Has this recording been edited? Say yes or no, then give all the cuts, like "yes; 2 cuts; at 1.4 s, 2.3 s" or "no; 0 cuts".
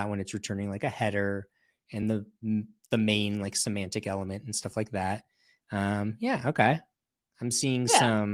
no; 0 cuts